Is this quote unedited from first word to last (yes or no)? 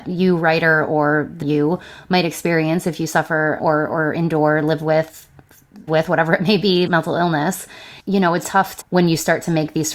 no